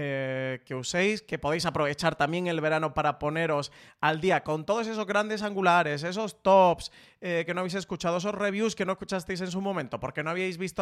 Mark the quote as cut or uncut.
uncut